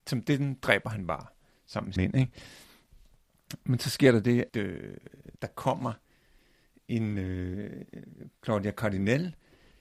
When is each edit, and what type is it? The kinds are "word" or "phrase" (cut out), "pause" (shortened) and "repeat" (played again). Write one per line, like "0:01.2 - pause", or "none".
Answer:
0:02.0 - word
0:04.5 - word
0:05.4 - pause